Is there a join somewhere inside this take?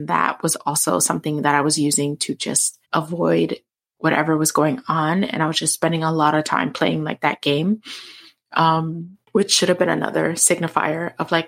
yes; 2 cuts; at 2.8 s, 9.2 s

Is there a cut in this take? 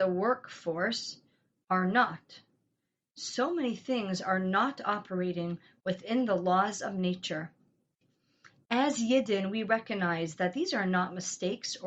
no; 0 cuts

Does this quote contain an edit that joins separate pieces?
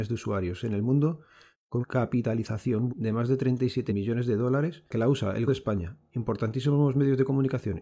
yes; 5 cuts; at 1.8 s, 2.9 s, 3.9 s, 4.9 s, 5.5 s

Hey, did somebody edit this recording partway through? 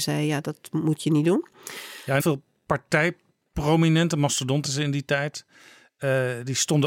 yes; 2 cuts; at 2.2 s, 4.6 s

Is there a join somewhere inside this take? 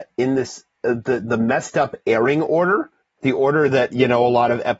yes; 1 cut; at 3.0 s

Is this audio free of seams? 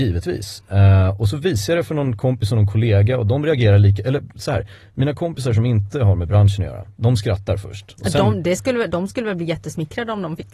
yes; 0 cuts

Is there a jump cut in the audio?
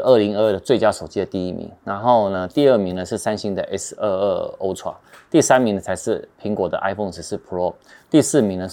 no; 0 cuts

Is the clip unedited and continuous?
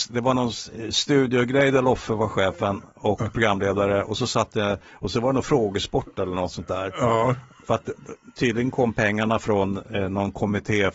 yes; 0 cuts

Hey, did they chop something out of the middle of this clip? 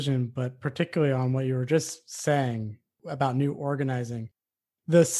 no; 0 cuts

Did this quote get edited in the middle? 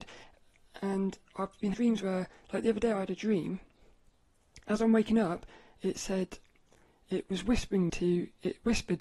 yes; 2 cuts; at 1.7 s, 7.9 s

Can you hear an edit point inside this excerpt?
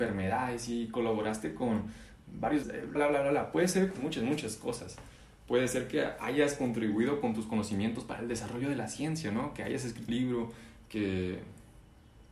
yes; 4 cuts; at 2.6 s, 3.0 s, 4.0 s, 10.1 s

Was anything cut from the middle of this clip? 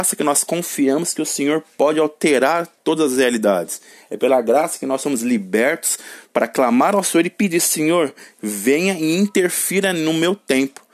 no; 0 cuts

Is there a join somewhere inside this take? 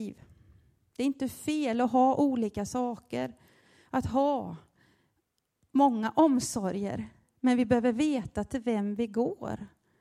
no; 0 cuts

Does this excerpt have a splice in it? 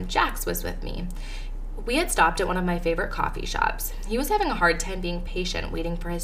no; 0 cuts

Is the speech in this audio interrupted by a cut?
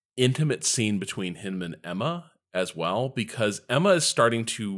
no; 0 cuts

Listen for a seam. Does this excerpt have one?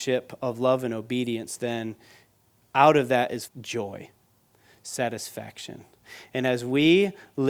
yes; 1 cut; at 3.4 s

